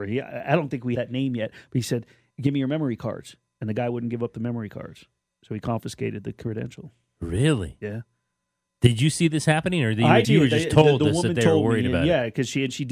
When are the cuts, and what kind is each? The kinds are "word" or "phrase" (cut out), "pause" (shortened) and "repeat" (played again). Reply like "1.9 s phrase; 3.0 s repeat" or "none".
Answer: 0.9 s word; 2.3 s word; 10.2 s word